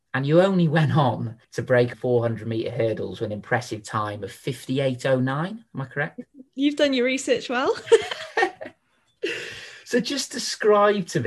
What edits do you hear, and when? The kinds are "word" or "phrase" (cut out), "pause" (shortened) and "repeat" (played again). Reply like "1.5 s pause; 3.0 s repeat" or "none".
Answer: 1.4 s pause; 1.9 s phrase; 6.5 s pause